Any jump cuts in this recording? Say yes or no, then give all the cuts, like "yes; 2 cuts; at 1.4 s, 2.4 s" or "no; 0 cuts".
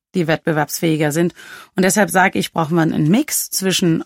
no; 0 cuts